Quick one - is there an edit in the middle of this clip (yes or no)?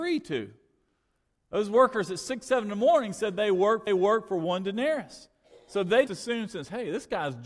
yes